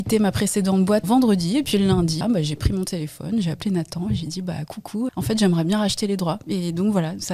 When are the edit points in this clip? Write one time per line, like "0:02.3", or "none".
0:01.0
0:02.2
0:05.1